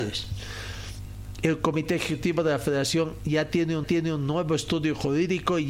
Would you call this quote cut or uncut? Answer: cut